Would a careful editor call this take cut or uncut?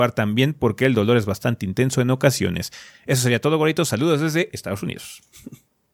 uncut